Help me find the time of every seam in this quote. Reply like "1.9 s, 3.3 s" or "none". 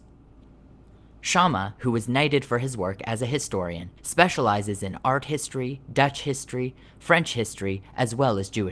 4.0 s